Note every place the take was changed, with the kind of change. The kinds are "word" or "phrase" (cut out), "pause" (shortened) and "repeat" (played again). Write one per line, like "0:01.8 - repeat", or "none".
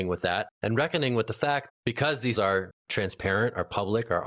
0:01.7 - word
0:02.4 - word

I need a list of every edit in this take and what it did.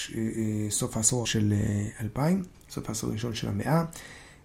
0:01.2 - word

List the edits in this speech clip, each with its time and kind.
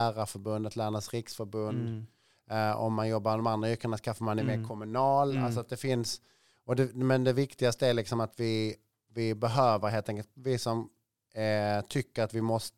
none

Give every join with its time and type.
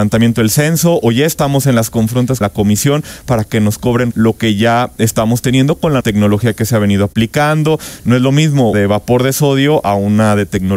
0:02.4 - word
0:04.1 - word
0:06.0 - word
0:08.7 - phrase

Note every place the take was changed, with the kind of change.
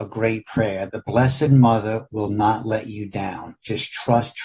none

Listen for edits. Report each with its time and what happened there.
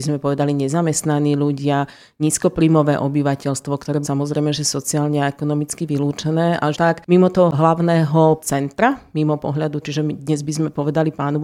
0:04.0 - word
0:06.7 - word
0:08.4 - word
0:09.8 - word

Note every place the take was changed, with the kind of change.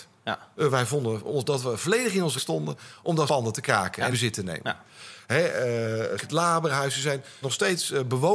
0:02.4 - word
0:03.3 - word
0:04.1 - word
0:06.2 - word
0:07.4 - word

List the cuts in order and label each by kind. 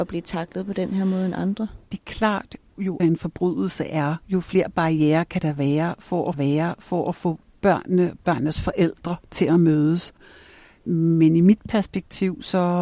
0:03.0 - word
0:04.2 - pause
0:06.3 - repeat
0:09.2 - pause

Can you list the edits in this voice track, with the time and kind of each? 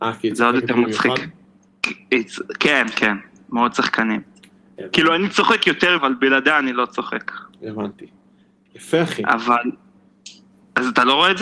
0:06.0 - word

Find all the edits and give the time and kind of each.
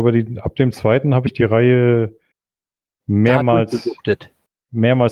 none

